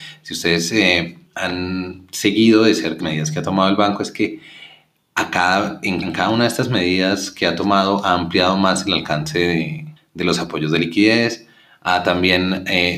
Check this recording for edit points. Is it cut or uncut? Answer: cut